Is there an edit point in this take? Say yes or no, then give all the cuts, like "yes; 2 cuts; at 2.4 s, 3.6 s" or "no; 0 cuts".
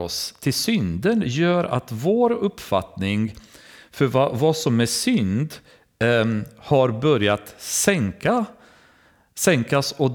no; 0 cuts